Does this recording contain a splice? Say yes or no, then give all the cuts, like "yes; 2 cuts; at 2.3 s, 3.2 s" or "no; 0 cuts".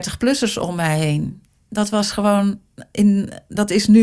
no; 0 cuts